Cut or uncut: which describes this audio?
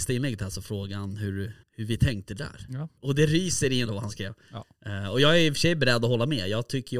cut